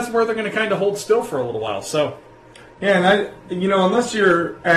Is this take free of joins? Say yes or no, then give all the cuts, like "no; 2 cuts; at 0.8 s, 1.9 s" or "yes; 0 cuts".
yes; 0 cuts